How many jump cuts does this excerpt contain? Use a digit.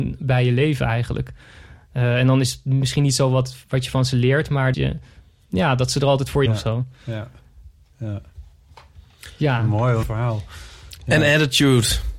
3